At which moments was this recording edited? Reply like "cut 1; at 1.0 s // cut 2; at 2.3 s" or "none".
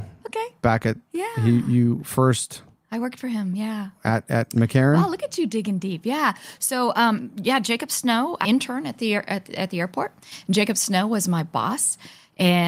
cut 1; at 8.4 s